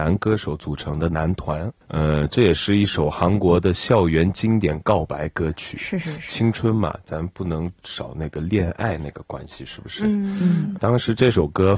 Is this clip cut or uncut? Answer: cut